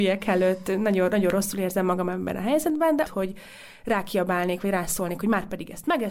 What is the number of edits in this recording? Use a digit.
1